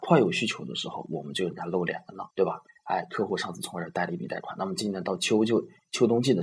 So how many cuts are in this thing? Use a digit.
1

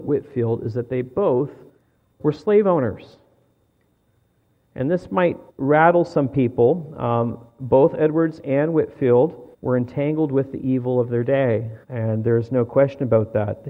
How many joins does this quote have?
4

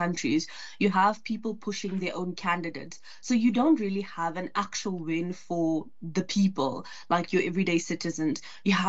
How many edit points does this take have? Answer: 0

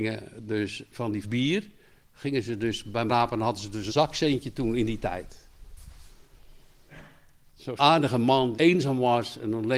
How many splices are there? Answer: 5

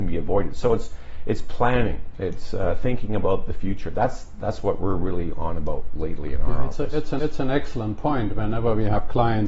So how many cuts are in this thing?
1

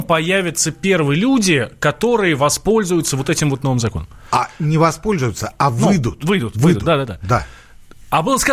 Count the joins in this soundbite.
0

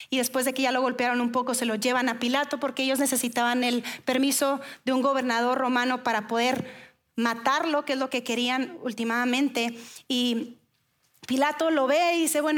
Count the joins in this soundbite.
0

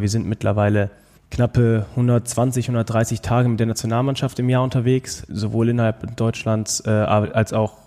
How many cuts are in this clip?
2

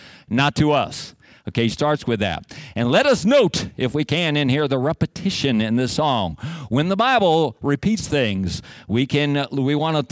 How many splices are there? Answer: 0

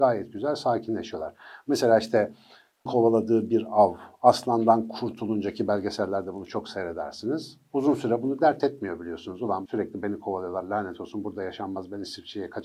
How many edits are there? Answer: 2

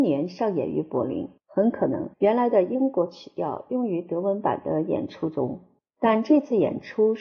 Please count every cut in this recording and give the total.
3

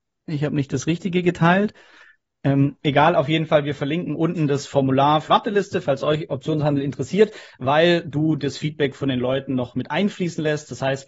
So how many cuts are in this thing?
1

